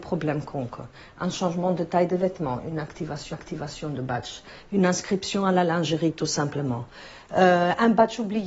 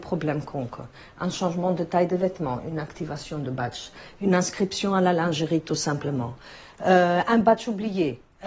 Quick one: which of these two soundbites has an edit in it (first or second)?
first